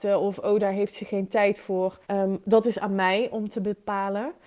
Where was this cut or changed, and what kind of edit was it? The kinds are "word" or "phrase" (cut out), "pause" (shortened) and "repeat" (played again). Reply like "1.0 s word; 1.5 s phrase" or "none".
2.0 s pause